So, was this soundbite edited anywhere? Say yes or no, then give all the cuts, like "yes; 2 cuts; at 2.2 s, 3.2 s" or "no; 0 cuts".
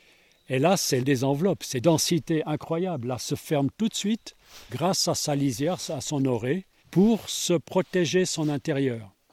yes; 5 cuts; at 1.0 s, 1.8 s, 3.2 s, 4.7 s, 6.8 s